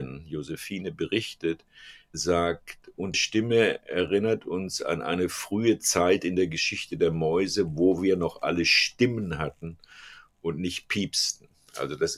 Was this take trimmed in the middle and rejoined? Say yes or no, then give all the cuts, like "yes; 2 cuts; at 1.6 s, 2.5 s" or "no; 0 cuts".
yes; 1 cut; at 3.1 s